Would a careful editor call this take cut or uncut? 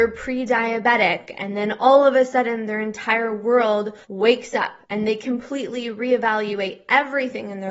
cut